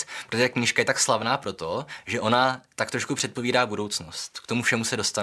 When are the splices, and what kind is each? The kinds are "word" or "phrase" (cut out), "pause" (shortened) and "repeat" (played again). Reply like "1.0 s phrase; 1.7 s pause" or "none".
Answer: none